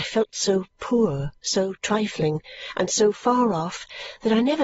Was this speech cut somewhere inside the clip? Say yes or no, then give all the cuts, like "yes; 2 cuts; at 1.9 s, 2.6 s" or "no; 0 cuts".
yes; 1 cut; at 1.4 s